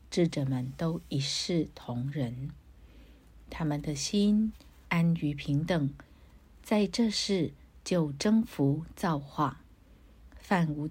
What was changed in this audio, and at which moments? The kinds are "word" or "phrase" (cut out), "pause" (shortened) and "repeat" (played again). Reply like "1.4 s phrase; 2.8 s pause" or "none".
none